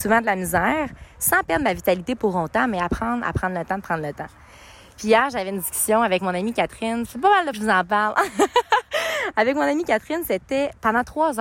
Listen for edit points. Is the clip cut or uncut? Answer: cut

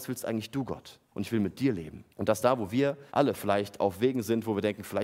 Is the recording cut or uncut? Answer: cut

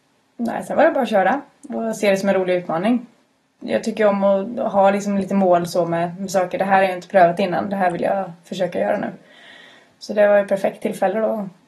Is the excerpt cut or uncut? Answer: uncut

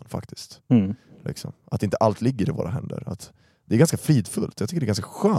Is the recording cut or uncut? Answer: uncut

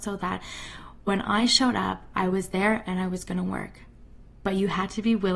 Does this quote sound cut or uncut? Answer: uncut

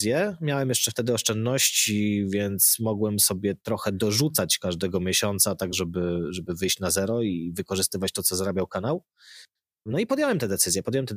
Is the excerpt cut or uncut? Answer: uncut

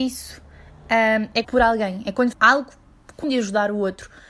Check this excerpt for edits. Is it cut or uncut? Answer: cut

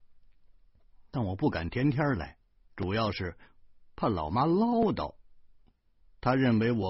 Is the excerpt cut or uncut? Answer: uncut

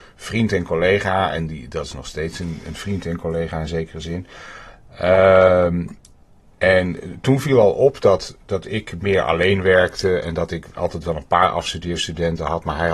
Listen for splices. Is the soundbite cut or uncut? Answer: uncut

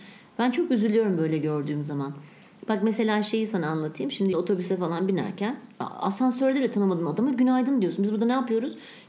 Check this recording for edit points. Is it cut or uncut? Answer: cut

